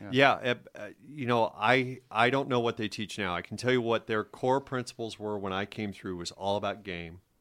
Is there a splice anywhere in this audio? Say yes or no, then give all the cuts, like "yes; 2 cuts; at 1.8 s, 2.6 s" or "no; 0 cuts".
no; 0 cuts